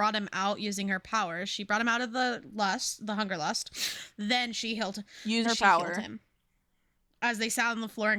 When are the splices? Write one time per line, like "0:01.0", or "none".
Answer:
0:05.4